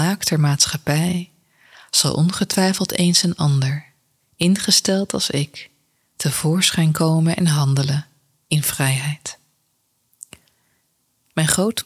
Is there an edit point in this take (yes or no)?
no